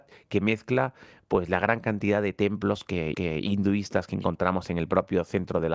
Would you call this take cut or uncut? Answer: cut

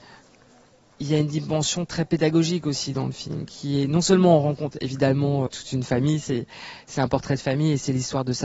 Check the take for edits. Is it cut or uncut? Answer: cut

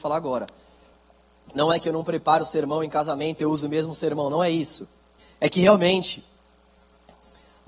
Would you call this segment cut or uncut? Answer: cut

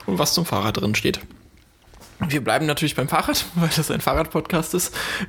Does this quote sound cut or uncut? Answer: uncut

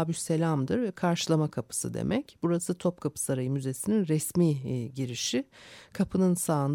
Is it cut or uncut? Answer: uncut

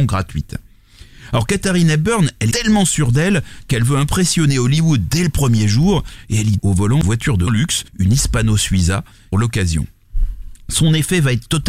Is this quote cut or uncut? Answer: cut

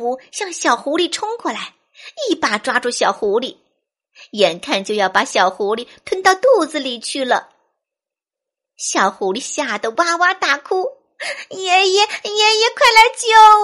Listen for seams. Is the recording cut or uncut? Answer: uncut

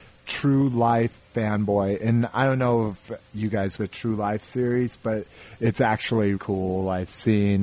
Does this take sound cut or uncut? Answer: cut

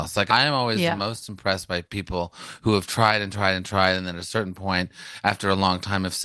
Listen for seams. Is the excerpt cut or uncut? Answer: uncut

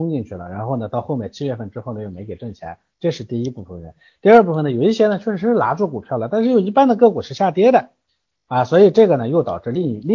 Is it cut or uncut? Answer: uncut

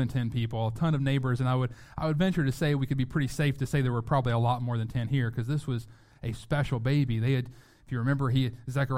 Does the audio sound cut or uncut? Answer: uncut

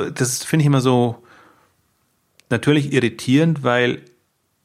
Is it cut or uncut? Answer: uncut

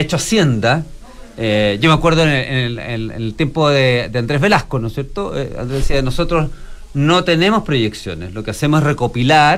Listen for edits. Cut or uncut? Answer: uncut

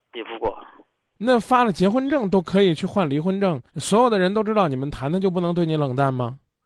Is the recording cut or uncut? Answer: cut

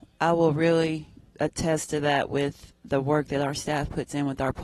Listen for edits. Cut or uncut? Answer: cut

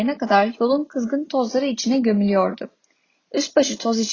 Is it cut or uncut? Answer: uncut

